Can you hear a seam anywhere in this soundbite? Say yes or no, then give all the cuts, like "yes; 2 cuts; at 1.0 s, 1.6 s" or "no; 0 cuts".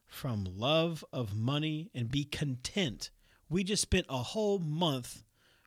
no; 0 cuts